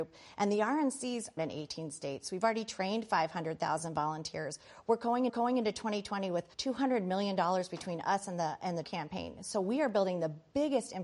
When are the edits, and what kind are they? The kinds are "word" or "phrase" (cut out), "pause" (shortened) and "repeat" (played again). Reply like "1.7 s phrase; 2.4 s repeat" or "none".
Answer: 1.4 s phrase; 5.3 s repeat; 6.5 s pause; 8.8 s word